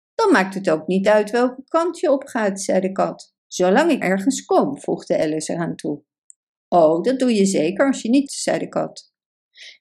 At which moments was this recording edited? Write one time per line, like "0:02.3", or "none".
0:03.4
0:04.0
0:08.3

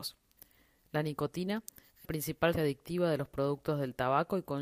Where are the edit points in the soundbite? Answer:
0:02.0
0:02.5

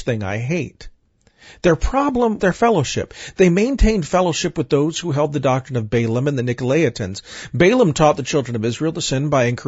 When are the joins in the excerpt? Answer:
0:02.4

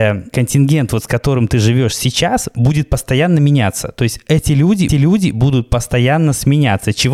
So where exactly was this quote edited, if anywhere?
0:04.9

